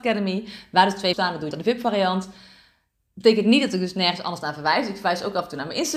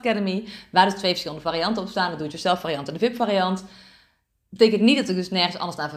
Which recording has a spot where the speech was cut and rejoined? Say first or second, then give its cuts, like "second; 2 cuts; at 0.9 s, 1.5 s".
first; 2 cuts; at 1.1 s, 1.5 s